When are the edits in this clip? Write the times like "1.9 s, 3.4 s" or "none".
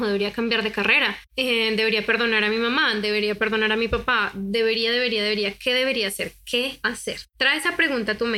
1.3 s, 6.8 s, 7.3 s

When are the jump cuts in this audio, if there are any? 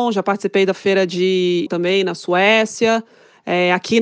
1.7 s

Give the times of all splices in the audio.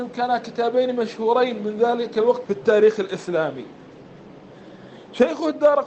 2.4 s

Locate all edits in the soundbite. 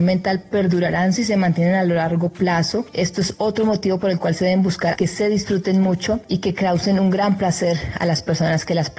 1.1 s, 4.9 s

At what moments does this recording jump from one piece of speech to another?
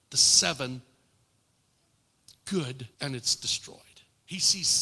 2.9 s

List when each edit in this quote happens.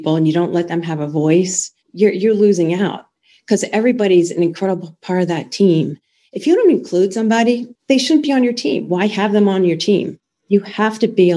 1.8 s, 7.8 s

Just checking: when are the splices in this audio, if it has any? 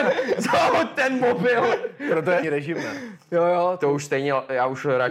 2.4 s

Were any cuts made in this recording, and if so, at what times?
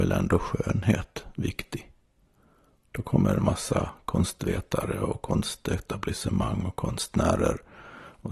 none

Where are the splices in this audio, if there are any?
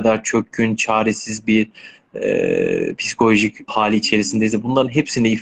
3.7 s

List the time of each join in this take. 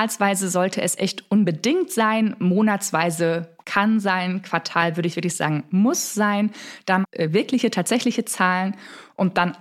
3.6 s, 7.0 s

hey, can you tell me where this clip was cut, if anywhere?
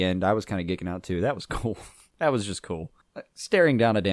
none

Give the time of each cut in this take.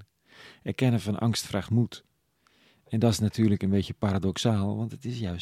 none

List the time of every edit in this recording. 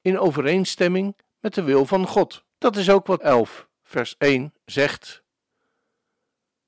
2.5 s, 3.2 s

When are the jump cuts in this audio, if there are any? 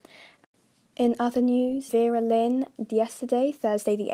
1.9 s, 2.9 s

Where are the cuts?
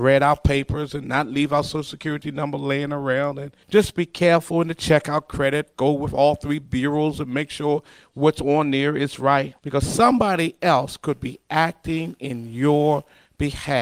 3.6 s, 9.6 s

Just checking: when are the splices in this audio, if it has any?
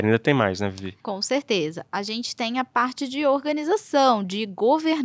1.0 s

